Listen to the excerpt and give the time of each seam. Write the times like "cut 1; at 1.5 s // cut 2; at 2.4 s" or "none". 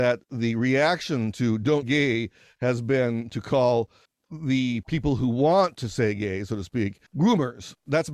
cut 1; at 1.8 s // cut 2; at 4.1 s // cut 3; at 7.1 s